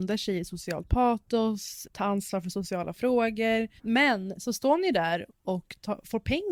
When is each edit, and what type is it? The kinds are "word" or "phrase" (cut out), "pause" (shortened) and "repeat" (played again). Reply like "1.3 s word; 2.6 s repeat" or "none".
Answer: 1.8 s word; 3.8 s pause